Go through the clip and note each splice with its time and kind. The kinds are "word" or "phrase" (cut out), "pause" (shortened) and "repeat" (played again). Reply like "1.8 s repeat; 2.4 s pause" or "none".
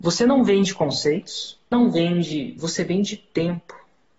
1.7 s word